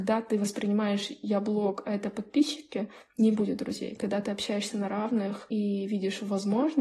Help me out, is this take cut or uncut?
uncut